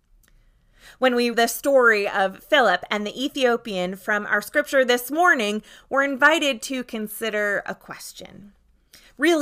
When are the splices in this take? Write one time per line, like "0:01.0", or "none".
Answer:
0:01.3